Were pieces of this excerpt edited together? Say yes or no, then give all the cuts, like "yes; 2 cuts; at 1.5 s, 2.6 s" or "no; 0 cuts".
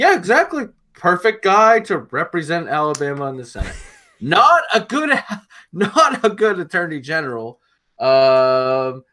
no; 0 cuts